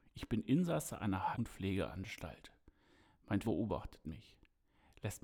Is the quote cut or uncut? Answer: cut